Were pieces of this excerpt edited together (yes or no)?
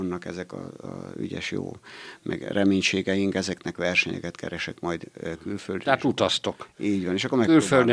no